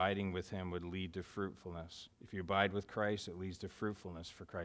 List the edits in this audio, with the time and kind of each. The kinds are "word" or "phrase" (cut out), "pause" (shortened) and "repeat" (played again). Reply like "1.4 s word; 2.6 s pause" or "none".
2.1 s pause